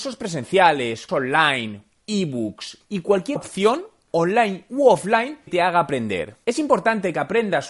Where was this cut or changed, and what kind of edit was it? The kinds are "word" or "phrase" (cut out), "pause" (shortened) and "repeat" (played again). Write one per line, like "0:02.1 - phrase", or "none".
0:01.1 - word
0:01.9 - word
0:02.8 - word
0:03.4 - word
0:05.5 - word